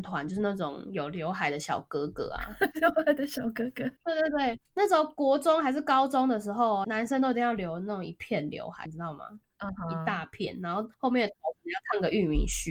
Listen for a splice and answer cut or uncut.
cut